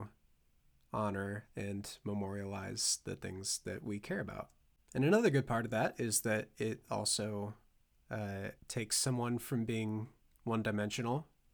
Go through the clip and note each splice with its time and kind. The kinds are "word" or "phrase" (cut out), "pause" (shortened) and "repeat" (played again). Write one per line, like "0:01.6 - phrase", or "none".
0:04.8 - pause
0:08.6 - pause